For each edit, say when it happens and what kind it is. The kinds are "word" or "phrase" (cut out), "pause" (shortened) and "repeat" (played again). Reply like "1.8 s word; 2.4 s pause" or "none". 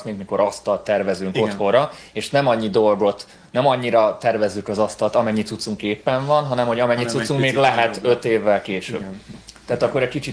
none